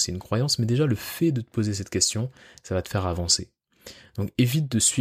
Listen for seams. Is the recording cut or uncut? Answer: uncut